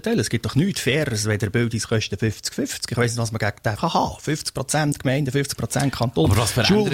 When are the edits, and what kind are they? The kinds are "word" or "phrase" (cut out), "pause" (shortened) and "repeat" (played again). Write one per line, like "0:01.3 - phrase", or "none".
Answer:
0:03.8 - word